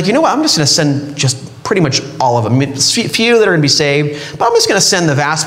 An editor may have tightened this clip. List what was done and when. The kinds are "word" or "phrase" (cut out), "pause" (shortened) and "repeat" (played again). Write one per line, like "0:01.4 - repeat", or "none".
none